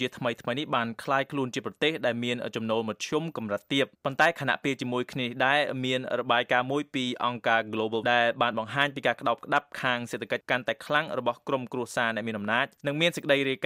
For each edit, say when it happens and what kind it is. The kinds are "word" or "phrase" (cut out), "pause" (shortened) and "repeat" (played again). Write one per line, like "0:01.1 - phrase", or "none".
0:03.9 - pause
0:08.0 - word
0:12.8 - pause